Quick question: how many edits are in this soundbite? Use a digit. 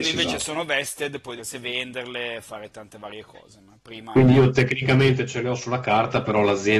1